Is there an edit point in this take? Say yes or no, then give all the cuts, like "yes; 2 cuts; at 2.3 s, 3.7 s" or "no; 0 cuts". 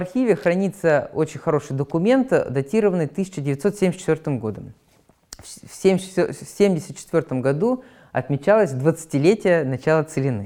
no; 0 cuts